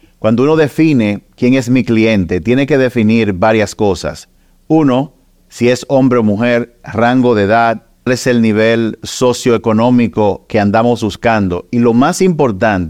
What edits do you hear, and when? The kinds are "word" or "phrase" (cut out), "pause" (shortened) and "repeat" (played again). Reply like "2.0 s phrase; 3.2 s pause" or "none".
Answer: 8.1 s word